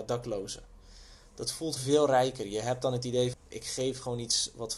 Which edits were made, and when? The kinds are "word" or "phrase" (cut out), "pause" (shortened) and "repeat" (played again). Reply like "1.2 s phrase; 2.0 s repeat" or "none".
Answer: 1.8 s word; 3.3 s word